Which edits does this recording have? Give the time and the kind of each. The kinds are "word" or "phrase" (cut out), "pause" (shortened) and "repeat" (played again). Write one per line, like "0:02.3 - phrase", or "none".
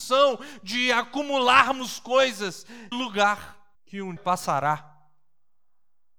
0:02.9 - word
0:03.7 - pause
0:04.2 - word